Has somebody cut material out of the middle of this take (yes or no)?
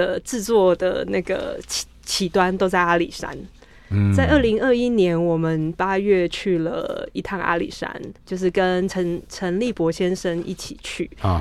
yes